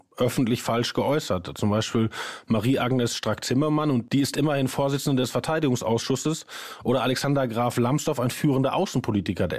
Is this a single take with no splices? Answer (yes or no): yes